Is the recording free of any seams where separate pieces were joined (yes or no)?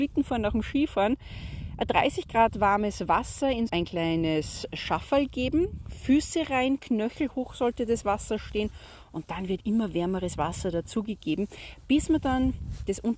no